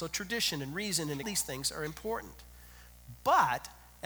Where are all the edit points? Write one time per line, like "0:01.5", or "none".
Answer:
0:01.2